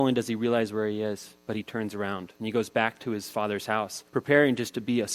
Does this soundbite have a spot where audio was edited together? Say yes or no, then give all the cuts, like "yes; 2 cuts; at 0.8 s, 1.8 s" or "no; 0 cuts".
yes; 3 cuts; at 1.4 s, 2.4 s, 4.1 s